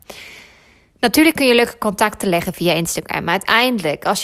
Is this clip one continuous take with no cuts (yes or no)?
yes